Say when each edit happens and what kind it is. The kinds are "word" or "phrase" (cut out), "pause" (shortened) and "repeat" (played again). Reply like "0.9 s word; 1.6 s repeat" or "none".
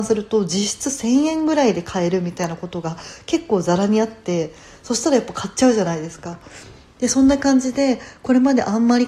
none